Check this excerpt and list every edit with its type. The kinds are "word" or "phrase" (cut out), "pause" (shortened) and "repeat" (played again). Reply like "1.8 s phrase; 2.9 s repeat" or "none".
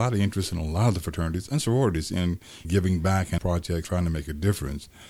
1.5 s word; 2.6 s word; 3.4 s word; 3.8 s word